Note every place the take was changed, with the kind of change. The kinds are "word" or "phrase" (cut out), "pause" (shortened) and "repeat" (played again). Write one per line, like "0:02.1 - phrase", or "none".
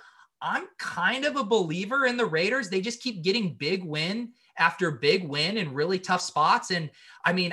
none